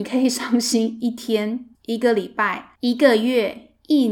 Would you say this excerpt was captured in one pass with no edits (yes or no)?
no